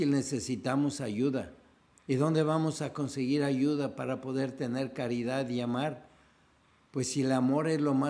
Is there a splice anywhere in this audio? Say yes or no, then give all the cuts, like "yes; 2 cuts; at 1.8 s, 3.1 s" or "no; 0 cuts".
no; 0 cuts